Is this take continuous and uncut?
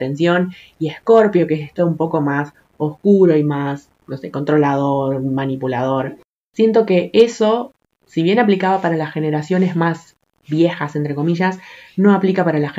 yes; 0 cuts

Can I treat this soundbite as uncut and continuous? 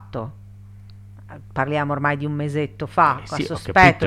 yes; 0 cuts

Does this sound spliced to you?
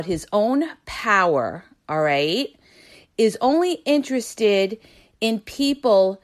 no; 0 cuts

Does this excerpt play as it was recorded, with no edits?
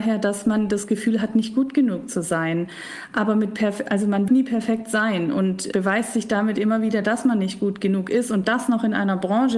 no; 2 cuts; at 4.3 s, 5.7 s

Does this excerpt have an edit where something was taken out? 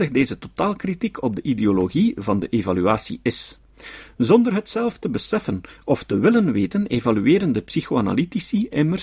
no; 0 cuts

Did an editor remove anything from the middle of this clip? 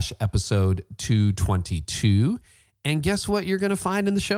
no; 0 cuts

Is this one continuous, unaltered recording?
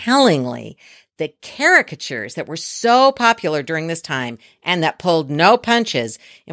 yes; 0 cuts

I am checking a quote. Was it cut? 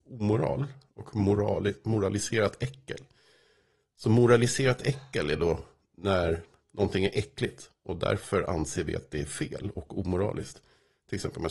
no; 0 cuts

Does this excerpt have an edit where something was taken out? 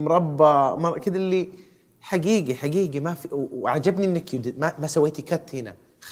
no; 0 cuts

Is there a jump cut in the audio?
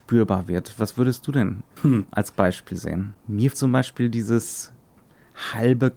yes; 3 cuts; at 1.7 s, 2.3 s, 3.5 s

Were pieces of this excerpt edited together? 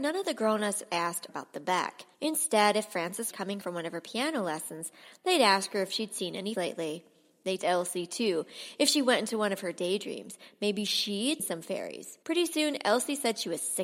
yes; 8 cuts; at 1.3 s, 2.1 s, 3.3 s, 3.6 s, 6.5 s, 7.6 s, 11.4 s, 12.2 s

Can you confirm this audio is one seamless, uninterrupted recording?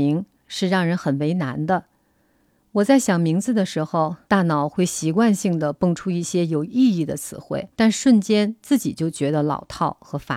no; 2 cuts; at 4.2 s, 7.7 s

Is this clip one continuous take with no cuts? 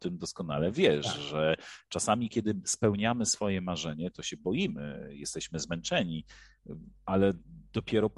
yes; 0 cuts

